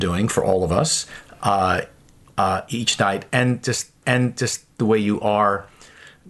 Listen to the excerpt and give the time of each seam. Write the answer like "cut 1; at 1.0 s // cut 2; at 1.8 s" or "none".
cut 1; at 4.0 s